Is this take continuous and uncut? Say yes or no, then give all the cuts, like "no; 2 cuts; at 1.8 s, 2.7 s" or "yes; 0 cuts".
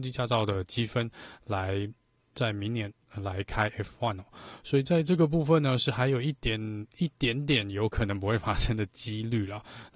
no; 1 cut; at 6.9 s